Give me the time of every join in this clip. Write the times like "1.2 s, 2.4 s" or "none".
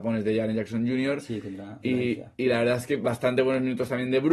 none